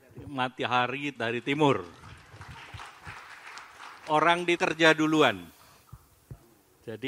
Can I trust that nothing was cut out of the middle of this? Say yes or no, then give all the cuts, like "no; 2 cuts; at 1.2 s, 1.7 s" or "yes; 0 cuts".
no; 2 cuts; at 1.2 s, 4.6 s